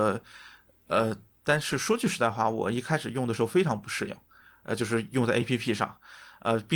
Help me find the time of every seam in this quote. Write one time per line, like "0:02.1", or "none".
none